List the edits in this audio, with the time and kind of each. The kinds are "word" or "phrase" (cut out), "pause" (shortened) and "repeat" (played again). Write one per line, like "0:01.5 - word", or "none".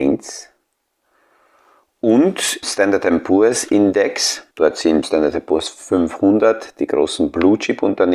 0:02.6 - word
0:04.5 - pause
0:05.0 - phrase